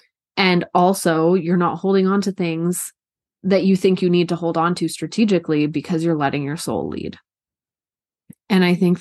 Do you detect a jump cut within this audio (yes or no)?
no